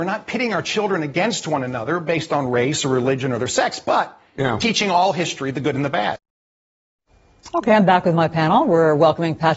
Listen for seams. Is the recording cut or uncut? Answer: uncut